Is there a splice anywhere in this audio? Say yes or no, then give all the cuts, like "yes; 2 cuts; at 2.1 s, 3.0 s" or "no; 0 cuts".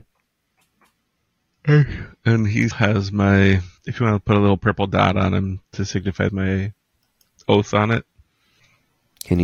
yes; 3 cuts; at 2.7 s, 3.8 s, 6.3 s